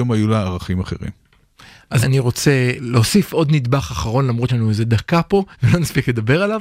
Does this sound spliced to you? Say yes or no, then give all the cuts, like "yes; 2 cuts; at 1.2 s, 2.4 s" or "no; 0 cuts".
yes; 4 cuts; at 2.0 s, 2.8 s, 4.5 s, 5.5 s